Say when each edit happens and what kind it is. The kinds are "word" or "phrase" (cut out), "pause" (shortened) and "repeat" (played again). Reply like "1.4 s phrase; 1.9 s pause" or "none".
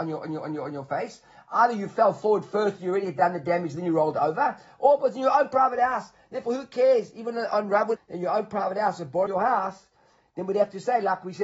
8.0 s phrase; 9.3 s word